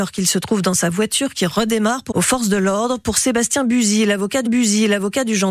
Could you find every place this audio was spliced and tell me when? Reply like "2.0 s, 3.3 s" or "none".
2.1 s, 4.5 s